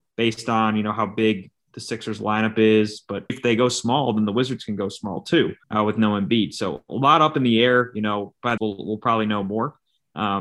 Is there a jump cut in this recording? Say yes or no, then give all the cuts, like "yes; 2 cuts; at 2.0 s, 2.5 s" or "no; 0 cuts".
yes; 3 cuts; at 3.3 s, 5.6 s, 8.6 s